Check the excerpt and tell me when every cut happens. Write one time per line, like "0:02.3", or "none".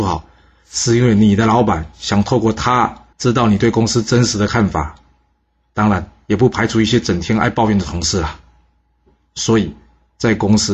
0:03.1